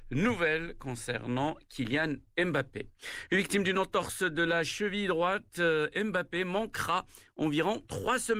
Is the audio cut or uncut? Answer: uncut